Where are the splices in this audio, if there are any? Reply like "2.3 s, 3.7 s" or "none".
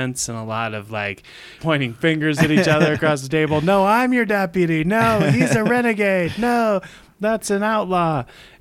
1.6 s